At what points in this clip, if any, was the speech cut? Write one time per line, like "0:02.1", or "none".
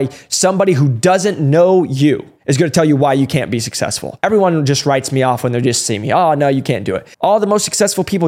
0:07.1